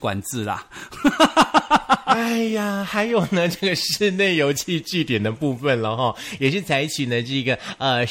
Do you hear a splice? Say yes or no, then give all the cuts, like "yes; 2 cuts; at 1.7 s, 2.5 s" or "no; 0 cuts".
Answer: no; 0 cuts